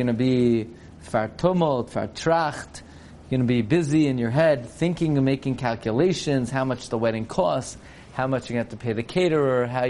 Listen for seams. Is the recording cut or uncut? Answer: uncut